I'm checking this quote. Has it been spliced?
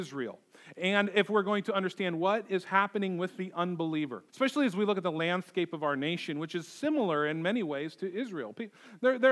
yes; 1 cut; at 4.3 s

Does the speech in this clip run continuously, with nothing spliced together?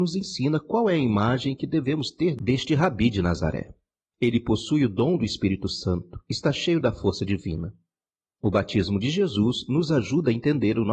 yes; 0 cuts

